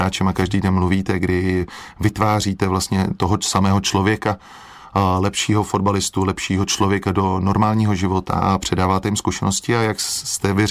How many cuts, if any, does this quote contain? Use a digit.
0